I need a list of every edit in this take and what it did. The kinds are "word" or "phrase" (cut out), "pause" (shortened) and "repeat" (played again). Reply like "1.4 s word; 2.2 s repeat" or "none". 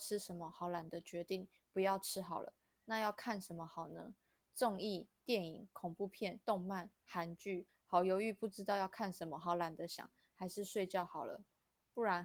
6.4 s pause; 7.7 s word